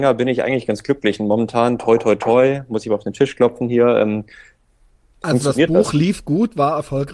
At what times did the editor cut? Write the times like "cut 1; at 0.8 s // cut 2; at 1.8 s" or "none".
none